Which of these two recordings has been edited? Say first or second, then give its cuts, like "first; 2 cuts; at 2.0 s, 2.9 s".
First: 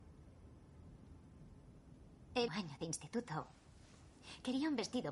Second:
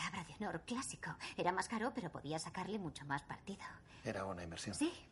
first; 1 cut; at 2.5 s